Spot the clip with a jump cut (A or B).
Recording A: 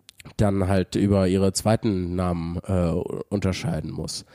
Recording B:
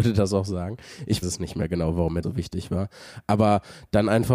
B